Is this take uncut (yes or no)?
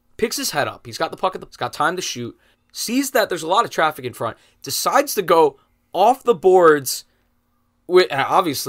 no